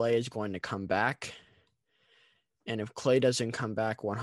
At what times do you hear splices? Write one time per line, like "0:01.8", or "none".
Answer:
none